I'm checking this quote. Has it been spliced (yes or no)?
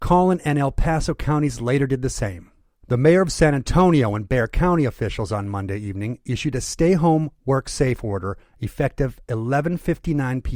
no